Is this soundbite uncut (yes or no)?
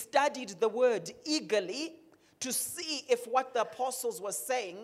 yes